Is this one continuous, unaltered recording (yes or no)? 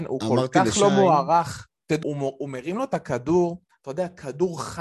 no